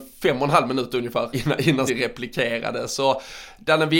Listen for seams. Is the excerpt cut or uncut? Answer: cut